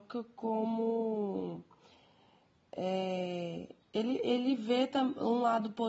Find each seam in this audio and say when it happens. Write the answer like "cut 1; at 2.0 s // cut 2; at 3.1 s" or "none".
cut 1; at 3.8 s